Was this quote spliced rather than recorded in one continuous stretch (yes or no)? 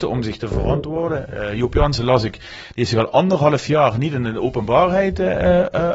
no